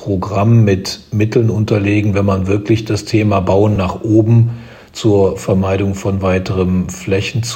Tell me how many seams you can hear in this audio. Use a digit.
0